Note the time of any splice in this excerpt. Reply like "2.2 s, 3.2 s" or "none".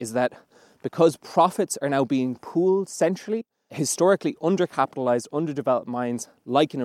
none